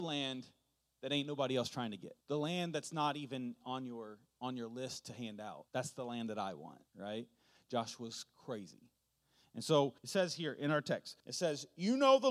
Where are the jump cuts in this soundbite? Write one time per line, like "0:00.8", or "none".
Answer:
0:02.2
0:05.7
0:06.9
0:10.0
0:11.2